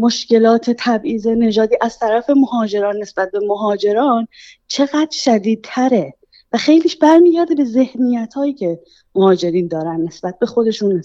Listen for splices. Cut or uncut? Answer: uncut